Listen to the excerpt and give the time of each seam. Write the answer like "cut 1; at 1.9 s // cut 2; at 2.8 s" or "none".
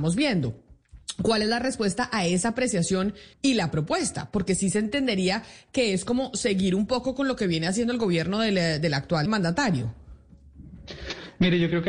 cut 1; at 3.3 s // cut 2; at 9.3 s